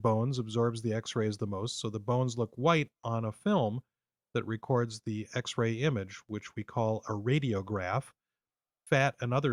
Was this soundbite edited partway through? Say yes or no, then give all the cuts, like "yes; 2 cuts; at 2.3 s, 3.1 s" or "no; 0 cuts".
no; 0 cuts